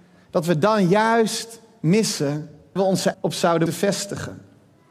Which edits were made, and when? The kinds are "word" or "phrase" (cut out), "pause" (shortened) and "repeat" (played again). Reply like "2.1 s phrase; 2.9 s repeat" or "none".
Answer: 2.8 s word; 3.1 s word; 3.7 s word